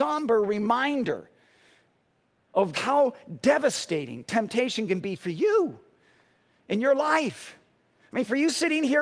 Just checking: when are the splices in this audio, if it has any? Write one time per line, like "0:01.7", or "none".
0:02.7